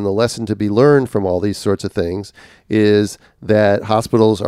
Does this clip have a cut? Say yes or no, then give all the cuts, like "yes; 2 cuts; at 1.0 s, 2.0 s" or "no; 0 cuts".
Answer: no; 0 cuts